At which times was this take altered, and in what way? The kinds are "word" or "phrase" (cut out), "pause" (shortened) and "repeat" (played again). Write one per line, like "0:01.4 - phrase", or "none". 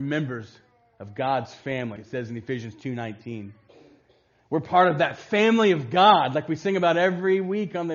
0:02.0 - word